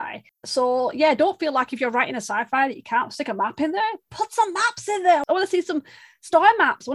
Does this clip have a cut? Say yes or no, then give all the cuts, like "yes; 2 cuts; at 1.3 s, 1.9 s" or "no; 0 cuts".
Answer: no; 0 cuts